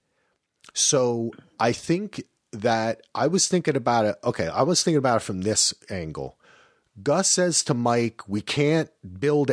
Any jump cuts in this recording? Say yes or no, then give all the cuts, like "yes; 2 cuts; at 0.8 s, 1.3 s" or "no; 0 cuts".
no; 0 cuts